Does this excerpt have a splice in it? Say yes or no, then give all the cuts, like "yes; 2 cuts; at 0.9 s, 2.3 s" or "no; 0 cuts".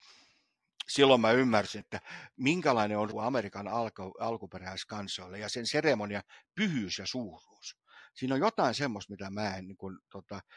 yes; 2 cuts; at 1.8 s, 3.1 s